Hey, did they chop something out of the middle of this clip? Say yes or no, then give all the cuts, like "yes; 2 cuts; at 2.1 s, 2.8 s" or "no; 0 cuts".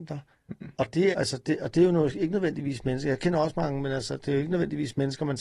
yes; 1 cut; at 1.1 s